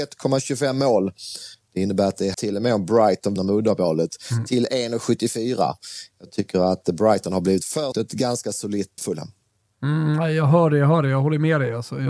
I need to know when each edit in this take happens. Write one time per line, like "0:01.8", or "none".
0:02.3
0:03.4
0:07.9
0:09.0